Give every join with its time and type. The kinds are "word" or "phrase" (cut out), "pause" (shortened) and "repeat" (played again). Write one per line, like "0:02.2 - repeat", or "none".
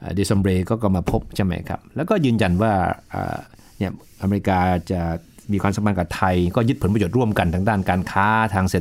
none